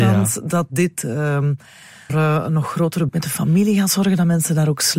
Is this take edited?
yes; 2 cuts; at 2.1 s, 3.1 s

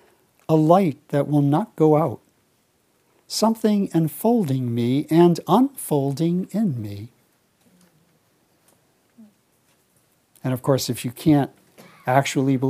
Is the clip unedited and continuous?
yes; 0 cuts

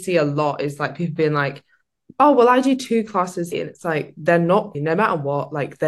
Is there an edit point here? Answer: yes; 2 cuts; at 3.5 s, 4.7 s

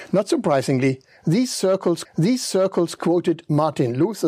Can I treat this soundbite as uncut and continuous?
no; 1 cut; at 2.0 s

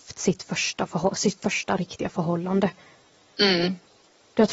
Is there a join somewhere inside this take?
no; 0 cuts

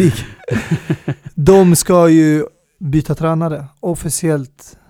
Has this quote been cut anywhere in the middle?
no; 0 cuts

